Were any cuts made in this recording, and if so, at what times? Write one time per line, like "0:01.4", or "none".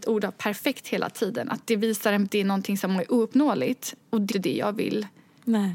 0:02.3
0:04.3

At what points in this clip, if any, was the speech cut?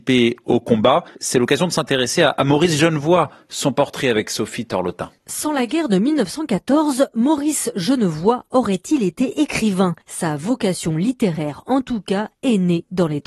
0:01.1
0:05.2
0:10.0

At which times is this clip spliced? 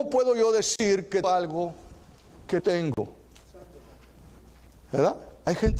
0:01.2
0:02.6

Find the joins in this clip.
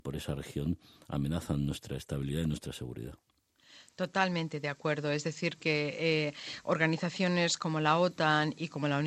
none

